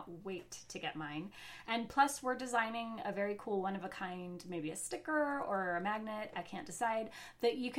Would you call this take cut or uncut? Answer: uncut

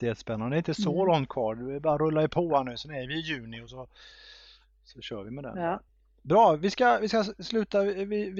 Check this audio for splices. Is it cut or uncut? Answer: uncut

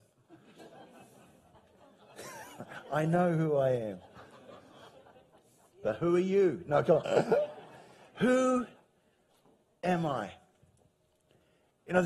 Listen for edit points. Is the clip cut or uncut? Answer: uncut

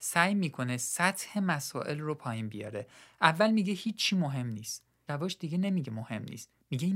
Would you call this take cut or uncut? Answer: cut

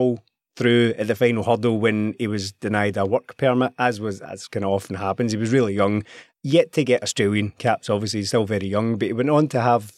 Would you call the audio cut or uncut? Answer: uncut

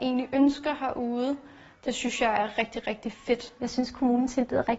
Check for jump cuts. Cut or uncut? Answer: uncut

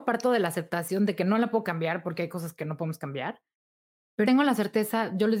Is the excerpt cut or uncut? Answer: cut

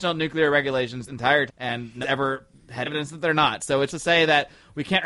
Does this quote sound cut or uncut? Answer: cut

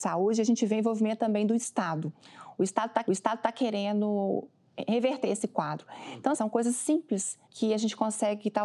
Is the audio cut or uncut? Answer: cut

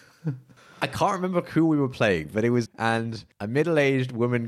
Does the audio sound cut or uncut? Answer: cut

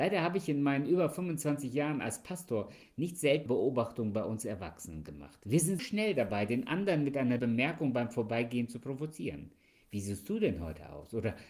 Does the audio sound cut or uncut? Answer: cut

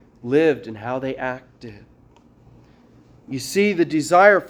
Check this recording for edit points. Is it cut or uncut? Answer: uncut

